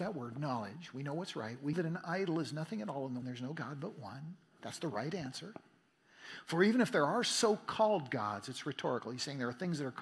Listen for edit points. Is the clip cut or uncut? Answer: cut